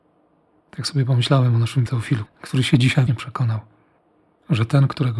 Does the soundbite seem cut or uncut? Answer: cut